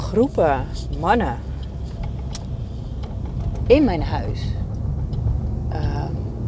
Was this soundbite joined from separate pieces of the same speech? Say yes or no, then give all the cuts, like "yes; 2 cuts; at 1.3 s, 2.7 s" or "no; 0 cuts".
no; 0 cuts